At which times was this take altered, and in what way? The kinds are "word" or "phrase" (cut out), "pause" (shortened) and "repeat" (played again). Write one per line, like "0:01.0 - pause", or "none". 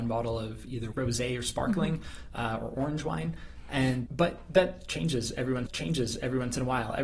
0:00.9 - word
0:04.1 - word
0:05.7 - repeat

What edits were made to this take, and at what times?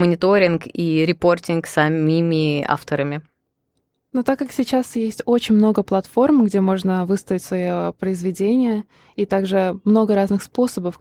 none

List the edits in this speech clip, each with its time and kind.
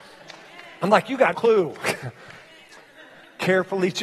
0:01.3 - word

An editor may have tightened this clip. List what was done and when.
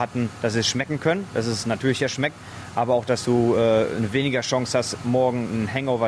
none

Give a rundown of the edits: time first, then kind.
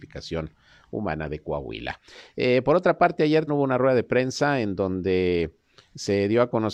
0:03.5 - word

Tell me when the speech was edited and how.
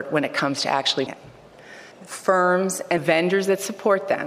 0:01.1 - word
0:01.9 - pause
0:03.0 - word

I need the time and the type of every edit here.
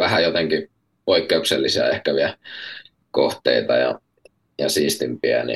none

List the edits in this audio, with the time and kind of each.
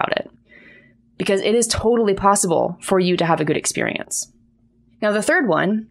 none

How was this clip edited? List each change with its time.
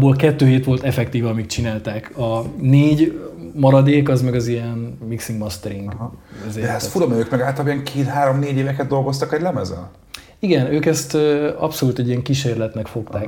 none

